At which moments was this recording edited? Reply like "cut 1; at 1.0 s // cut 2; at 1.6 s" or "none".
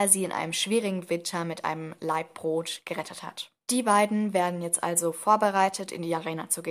cut 1; at 3.6 s